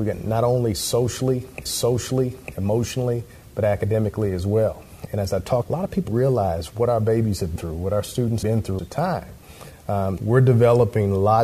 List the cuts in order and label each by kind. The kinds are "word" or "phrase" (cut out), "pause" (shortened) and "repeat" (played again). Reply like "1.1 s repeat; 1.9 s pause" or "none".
1.7 s repeat; 5.6 s phrase; 6.1 s word; 7.6 s word; 8.4 s word; 8.8 s phrase; 10.2 s word